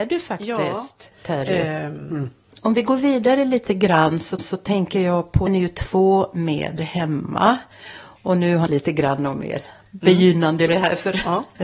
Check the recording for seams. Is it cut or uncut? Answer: cut